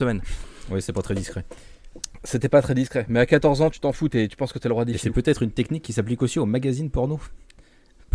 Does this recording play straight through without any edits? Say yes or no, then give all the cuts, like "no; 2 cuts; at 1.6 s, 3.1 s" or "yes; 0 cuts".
yes; 0 cuts